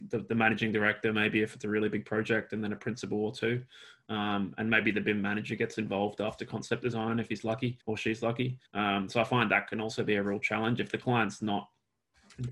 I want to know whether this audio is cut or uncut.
cut